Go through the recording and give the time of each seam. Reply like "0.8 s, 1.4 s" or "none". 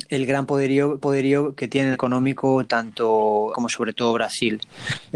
1.0 s, 1.9 s, 3.5 s